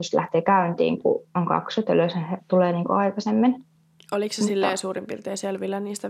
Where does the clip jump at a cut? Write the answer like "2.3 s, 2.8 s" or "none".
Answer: none